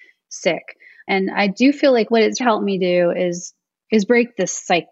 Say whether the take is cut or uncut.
cut